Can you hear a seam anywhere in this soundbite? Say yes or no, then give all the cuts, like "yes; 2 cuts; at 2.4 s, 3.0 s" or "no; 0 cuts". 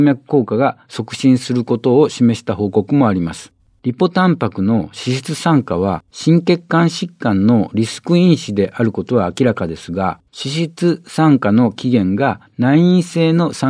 yes; 3 cuts; at 3.6 s, 6.1 s, 10.3 s